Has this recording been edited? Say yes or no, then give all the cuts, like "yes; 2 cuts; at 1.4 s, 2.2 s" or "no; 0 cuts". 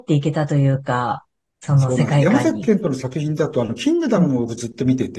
no; 0 cuts